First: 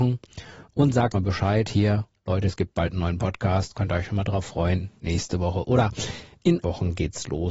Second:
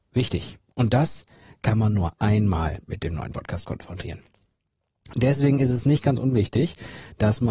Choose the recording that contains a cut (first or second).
first